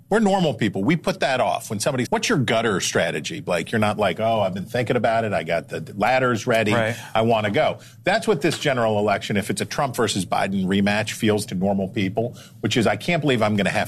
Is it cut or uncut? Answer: cut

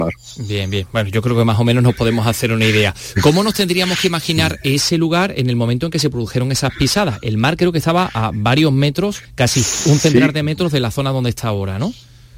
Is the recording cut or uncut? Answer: cut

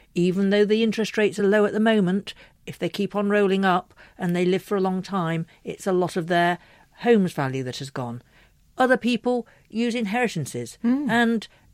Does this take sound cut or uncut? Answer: uncut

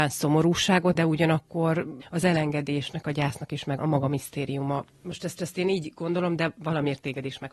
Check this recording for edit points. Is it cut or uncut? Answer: cut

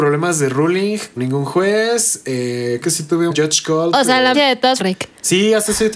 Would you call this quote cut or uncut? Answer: cut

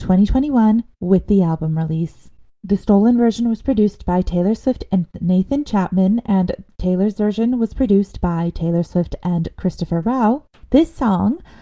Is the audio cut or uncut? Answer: uncut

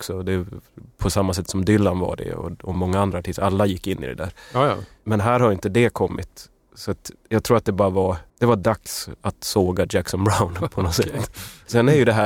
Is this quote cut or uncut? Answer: cut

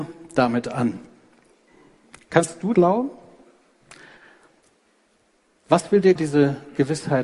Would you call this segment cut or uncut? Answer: cut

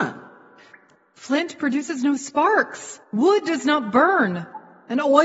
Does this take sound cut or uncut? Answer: cut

